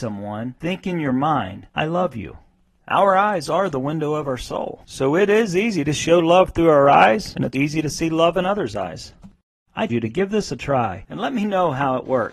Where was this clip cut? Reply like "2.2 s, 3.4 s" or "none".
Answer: 7.5 s, 9.9 s